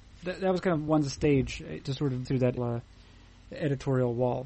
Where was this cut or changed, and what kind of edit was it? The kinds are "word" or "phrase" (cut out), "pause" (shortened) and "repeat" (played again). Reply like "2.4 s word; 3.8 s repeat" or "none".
1.8 s phrase; 2.2 s word; 2.6 s word

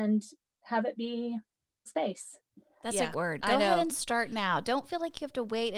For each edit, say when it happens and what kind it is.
1.9 s word; 3.1 s word

